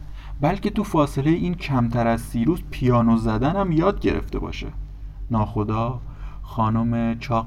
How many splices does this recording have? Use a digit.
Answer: 0